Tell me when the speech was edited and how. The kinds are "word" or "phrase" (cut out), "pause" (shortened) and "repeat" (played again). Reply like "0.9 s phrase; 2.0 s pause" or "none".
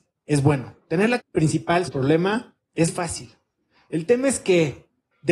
1.2 s word; 1.9 s word; 2.9 s word